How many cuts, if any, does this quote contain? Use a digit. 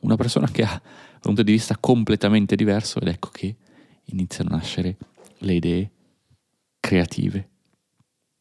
1